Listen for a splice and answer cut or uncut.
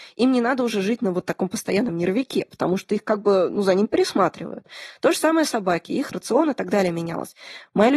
cut